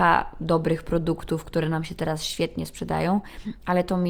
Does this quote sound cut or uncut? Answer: uncut